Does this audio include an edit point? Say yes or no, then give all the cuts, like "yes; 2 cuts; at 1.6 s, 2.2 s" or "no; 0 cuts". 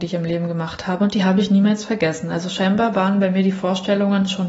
no; 0 cuts